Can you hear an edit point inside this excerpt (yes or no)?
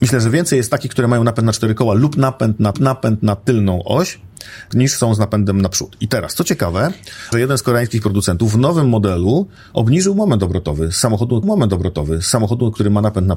yes